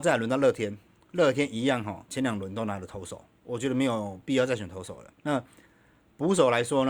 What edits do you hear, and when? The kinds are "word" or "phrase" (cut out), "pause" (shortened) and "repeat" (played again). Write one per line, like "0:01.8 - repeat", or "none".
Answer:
0:05.2 - pause